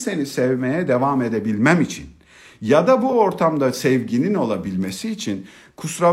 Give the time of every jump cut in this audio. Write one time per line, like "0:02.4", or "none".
none